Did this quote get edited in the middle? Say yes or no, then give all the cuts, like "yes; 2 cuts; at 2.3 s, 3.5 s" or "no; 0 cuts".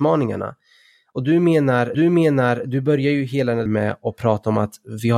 yes; 2 cuts; at 1.9 s, 3.7 s